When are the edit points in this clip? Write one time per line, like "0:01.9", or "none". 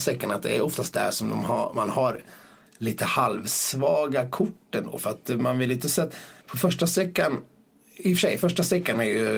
0:06.4